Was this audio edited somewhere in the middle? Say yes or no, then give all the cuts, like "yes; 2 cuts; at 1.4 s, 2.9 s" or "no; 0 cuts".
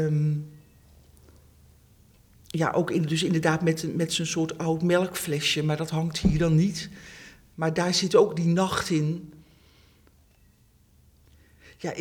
no; 0 cuts